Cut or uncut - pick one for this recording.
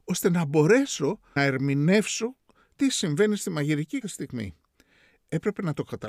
cut